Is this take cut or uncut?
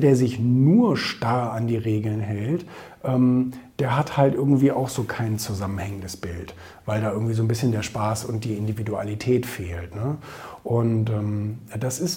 uncut